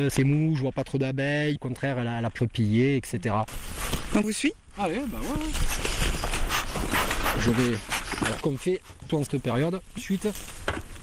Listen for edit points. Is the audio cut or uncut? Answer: cut